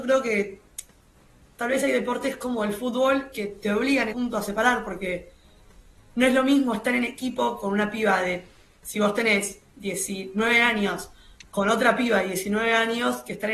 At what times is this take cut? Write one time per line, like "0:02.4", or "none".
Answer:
0:04.1

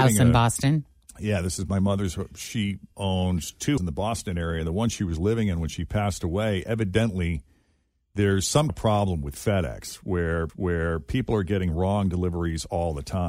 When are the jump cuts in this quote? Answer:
0:02.9
0:03.8
0:08.7
0:10.5

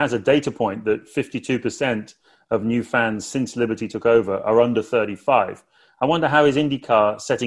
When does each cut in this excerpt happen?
none

